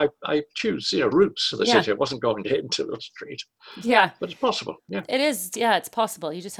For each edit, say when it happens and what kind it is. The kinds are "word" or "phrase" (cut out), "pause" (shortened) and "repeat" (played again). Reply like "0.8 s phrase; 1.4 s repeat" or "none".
1.1 s word; 1.5 s word; 2.4 s word; 3.0 s word